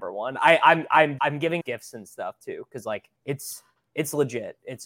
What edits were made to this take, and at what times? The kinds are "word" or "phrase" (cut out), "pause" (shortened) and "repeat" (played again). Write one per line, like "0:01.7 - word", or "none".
0:01.2 - word
0:01.6 - phrase
0:03.2 - pause